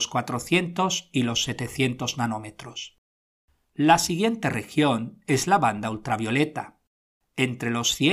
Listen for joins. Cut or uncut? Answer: uncut